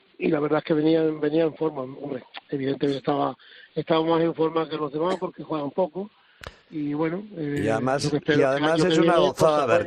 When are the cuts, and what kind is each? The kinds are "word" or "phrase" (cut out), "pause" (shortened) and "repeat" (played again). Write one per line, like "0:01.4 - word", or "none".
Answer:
none